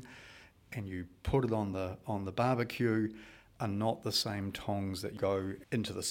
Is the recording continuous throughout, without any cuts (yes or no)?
yes